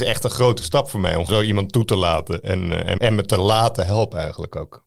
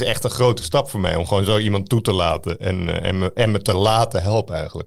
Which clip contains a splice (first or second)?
first